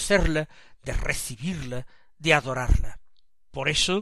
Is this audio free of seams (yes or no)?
yes